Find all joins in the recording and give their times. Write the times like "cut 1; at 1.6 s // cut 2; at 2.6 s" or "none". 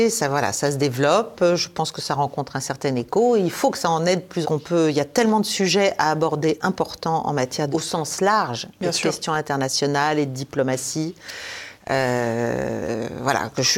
cut 1; at 4.4 s // cut 2; at 7.7 s